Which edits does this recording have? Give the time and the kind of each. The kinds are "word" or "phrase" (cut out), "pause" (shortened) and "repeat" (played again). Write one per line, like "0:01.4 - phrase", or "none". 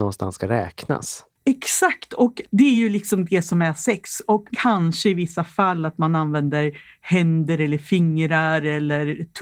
none